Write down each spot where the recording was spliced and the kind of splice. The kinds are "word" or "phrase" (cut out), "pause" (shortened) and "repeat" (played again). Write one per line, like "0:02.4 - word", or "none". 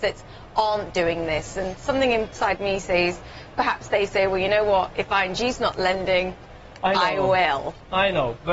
none